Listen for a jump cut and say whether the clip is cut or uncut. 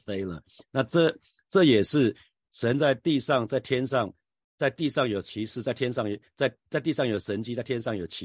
uncut